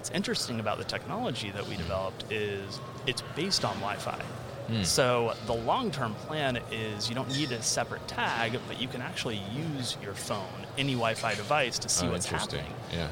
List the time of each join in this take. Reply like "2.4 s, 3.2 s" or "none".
none